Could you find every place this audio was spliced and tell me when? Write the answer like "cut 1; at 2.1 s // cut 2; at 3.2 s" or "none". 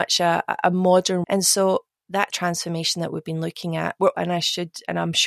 cut 1; at 1.2 s // cut 2; at 2.3 s // cut 3; at 4.1 s